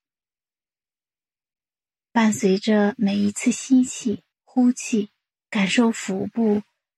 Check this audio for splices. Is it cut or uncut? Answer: cut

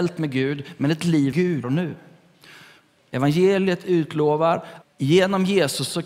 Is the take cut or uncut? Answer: cut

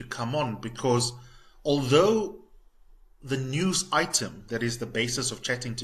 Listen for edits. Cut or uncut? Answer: uncut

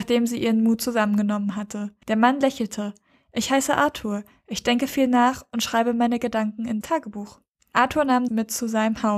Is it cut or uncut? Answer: cut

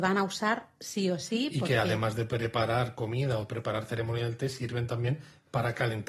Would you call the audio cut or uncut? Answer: uncut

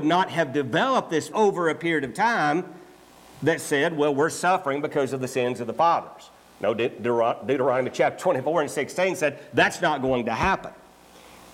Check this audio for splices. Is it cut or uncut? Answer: cut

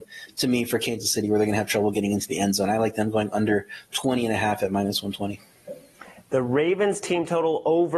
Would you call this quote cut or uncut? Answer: uncut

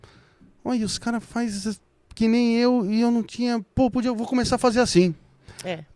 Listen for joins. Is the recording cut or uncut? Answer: uncut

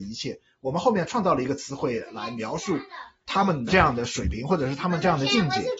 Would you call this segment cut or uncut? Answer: uncut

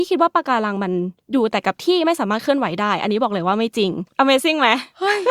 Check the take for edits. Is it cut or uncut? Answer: cut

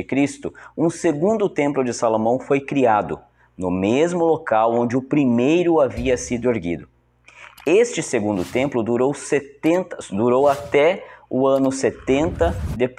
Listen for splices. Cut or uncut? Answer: uncut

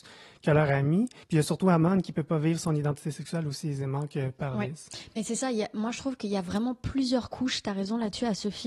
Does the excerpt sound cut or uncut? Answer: cut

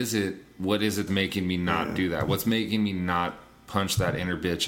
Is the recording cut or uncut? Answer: cut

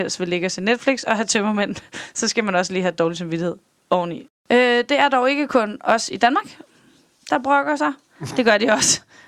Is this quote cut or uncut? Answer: uncut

